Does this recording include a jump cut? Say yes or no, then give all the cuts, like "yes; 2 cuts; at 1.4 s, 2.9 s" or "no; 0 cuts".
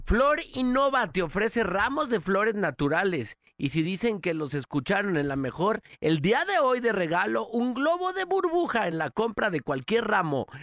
no; 0 cuts